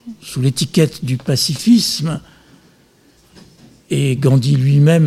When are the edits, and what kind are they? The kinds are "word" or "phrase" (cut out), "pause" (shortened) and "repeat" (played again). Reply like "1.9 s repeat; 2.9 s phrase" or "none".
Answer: none